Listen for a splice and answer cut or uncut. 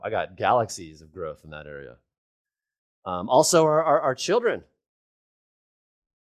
uncut